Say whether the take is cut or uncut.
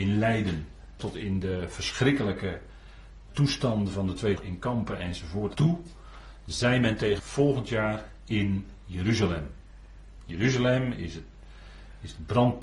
cut